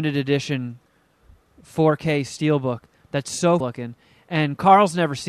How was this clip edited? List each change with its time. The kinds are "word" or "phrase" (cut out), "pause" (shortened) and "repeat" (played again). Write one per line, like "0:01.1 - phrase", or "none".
0:03.6 - phrase